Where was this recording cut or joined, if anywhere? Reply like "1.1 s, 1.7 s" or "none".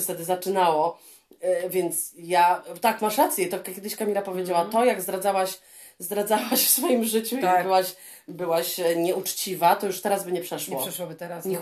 none